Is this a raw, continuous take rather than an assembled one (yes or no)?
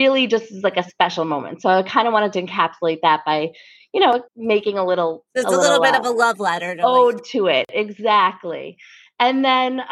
no